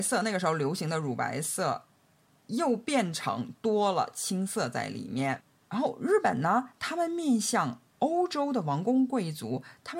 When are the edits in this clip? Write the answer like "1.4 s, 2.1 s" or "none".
none